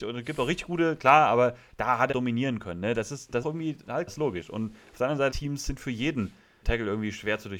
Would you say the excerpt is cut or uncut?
cut